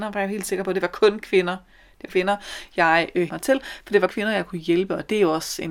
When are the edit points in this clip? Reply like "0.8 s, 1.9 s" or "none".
2.1 s, 3.3 s, 4.1 s